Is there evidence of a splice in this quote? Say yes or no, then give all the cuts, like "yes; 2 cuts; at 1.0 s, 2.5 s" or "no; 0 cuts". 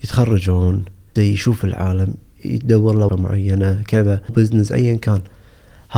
yes; 4 cuts; at 1.2 s, 2.4 s, 3.1 s, 4.3 s